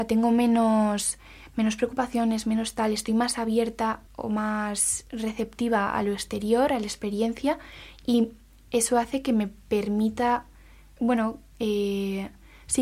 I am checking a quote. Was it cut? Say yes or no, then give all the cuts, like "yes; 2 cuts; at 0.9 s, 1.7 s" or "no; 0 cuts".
yes; 1 cut; at 4.1 s